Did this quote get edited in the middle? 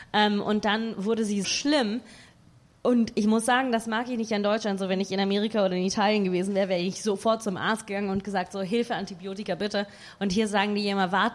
yes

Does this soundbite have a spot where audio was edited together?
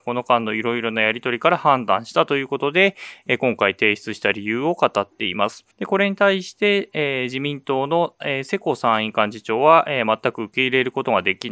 yes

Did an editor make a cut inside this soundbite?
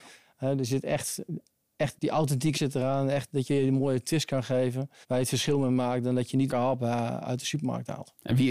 yes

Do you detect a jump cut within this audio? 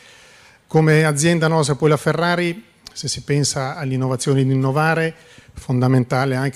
no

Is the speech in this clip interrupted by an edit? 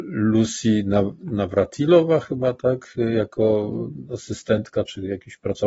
no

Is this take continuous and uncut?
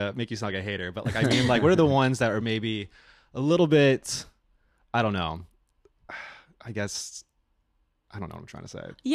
yes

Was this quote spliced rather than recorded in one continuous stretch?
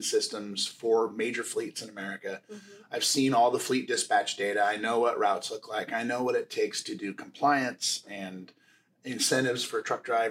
no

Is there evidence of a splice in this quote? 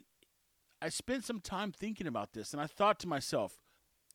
no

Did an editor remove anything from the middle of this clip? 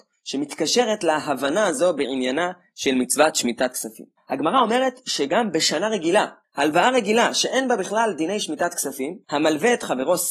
yes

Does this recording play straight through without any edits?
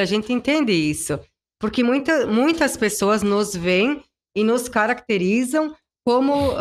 yes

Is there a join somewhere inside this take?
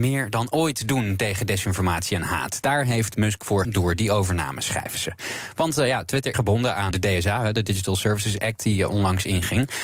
yes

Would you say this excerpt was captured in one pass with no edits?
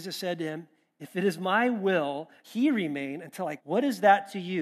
no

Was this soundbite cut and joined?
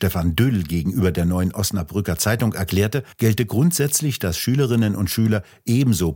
yes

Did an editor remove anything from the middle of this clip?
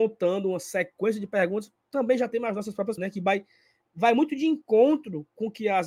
yes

